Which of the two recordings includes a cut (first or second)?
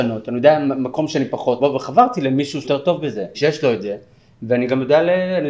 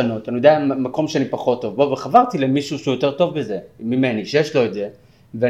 first